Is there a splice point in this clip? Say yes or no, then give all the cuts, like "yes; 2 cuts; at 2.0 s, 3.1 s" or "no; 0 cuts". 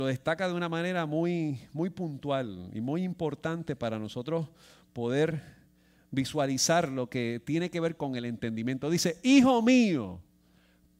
no; 0 cuts